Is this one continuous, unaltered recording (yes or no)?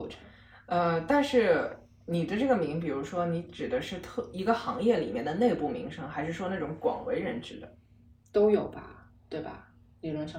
yes